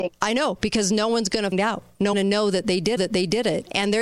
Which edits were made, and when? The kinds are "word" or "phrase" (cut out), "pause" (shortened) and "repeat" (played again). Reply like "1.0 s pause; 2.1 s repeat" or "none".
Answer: 1.5 s word; 2.1 s phrase; 3.0 s repeat